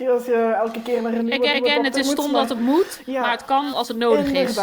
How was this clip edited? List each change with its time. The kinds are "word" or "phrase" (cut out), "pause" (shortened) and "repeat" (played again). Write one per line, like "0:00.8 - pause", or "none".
0:01.5 - repeat
0:03.7 - word